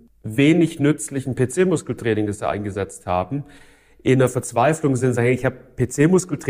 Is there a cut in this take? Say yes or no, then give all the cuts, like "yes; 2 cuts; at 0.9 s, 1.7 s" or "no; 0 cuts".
no; 0 cuts